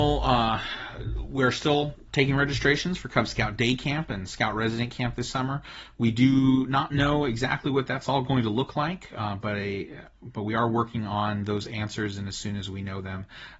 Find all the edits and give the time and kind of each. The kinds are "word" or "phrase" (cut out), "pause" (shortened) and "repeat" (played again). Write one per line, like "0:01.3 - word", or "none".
none